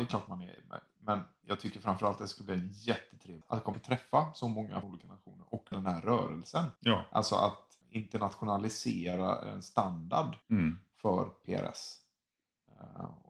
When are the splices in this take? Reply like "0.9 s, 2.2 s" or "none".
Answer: 3.4 s, 3.7 s, 4.8 s, 5.7 s, 6.8 s, 7.8 s, 10.4 s